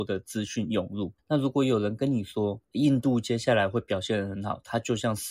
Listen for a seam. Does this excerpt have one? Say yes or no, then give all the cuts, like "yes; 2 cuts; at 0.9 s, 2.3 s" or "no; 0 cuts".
yes; 2 cuts; at 1.2 s, 2.6 s